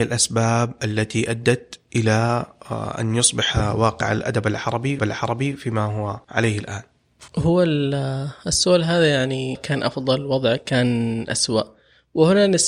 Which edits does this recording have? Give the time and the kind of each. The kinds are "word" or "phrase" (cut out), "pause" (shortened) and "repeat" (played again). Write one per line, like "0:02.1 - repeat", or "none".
0:05.0 - repeat
0:06.2 - pause
0:07.3 - pause
0:09.5 - phrase